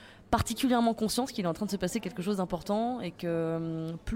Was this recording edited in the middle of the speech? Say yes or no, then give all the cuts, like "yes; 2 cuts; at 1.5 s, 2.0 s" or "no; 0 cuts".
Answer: no; 0 cuts